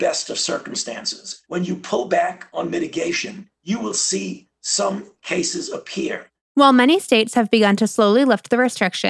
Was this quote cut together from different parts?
yes; 2 cuts; at 1.4 s, 3.5 s

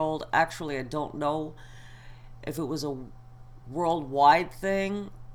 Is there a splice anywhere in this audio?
no; 0 cuts

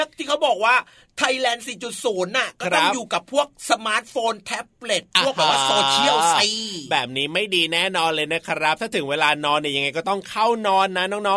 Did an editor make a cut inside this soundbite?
no; 0 cuts

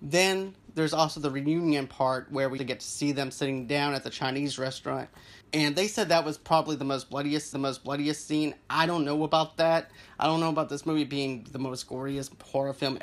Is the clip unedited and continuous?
no; 3 cuts; at 2.6 s, 5.4 s, 7.5 s

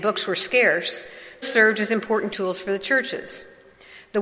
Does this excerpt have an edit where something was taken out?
yes; 2 cuts; at 1.4 s, 2.3 s

